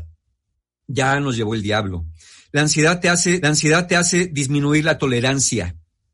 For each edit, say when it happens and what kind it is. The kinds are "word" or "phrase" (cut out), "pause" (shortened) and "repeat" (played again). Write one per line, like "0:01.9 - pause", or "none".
0:03.4 - repeat